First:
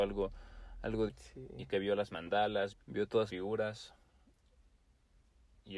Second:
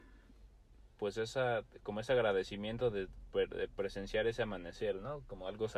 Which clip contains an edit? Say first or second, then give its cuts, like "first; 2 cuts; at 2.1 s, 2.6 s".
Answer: first; 4 cuts; at 1.1 s, 1.7 s, 2.7 s, 3.3 s